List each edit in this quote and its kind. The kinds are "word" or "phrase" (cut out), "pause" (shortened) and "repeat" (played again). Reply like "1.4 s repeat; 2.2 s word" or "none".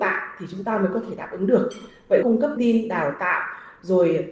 2.2 s word; 2.6 s word